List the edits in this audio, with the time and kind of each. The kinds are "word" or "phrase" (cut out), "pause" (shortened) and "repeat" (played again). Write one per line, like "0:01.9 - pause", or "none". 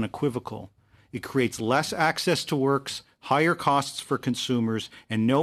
none